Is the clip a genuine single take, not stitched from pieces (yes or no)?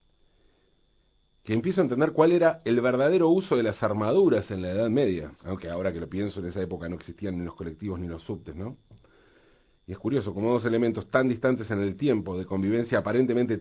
no